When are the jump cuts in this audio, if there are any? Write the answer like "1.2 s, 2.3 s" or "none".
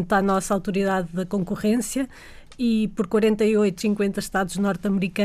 3.8 s